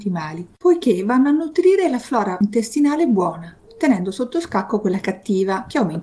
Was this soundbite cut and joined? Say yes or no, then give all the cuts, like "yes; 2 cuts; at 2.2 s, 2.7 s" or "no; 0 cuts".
no; 0 cuts